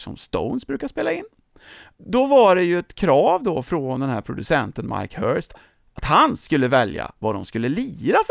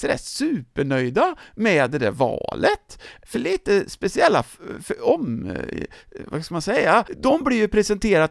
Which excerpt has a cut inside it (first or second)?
second